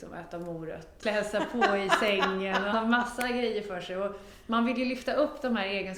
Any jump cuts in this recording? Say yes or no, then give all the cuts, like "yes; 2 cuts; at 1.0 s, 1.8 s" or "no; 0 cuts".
yes; 2 cuts; at 1.0 s, 2.7 s